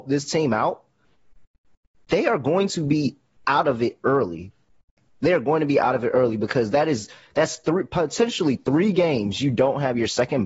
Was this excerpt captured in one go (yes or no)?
yes